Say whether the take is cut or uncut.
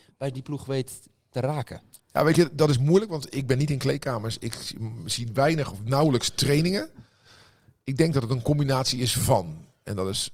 uncut